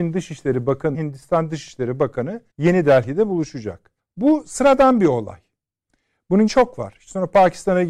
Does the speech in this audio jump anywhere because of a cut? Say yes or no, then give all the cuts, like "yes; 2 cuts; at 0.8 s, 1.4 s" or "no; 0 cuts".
yes; 4 cuts; at 0.9 s, 2.5 s, 4.0 s, 6.5 s